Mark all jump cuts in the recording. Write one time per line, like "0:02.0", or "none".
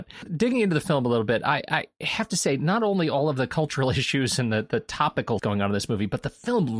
0:05.4